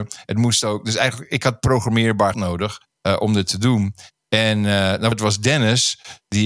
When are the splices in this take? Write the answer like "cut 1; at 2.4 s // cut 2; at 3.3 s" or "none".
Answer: cut 1; at 2.3 s // cut 2; at 2.9 s // cut 3; at 5.1 s